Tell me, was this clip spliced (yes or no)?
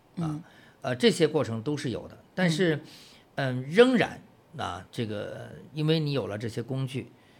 no